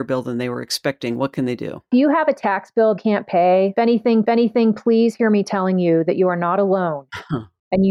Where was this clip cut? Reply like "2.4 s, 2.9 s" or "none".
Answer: 3.0 s, 4.2 s